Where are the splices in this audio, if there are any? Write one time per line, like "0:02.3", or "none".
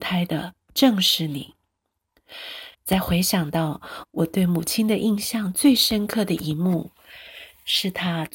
0:02.7